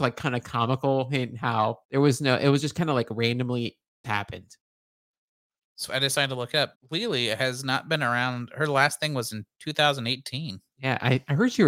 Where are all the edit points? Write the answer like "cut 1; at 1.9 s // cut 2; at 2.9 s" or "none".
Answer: cut 1; at 1.8 s // cut 2; at 4.0 s // cut 3; at 5.9 s // cut 4; at 6.7 s